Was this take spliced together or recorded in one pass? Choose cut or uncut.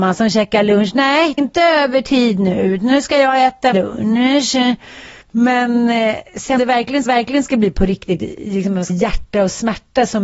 cut